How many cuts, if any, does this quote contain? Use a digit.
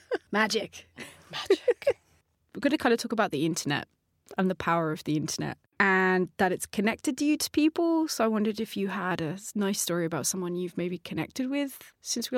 0